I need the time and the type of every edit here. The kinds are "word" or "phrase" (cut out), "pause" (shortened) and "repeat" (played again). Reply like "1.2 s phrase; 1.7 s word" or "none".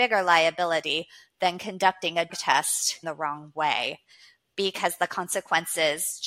2.3 s word; 3.0 s word